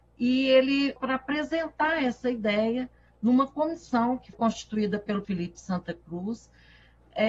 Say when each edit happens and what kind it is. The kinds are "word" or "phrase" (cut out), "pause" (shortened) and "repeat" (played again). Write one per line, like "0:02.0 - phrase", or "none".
0:01.0 - word
0:04.3 - word
0:05.2 - word